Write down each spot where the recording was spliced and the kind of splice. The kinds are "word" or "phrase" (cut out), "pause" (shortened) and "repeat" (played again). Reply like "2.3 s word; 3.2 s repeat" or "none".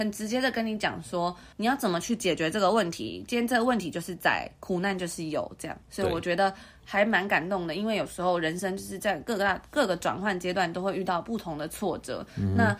1.5 s pause; 5.8 s pause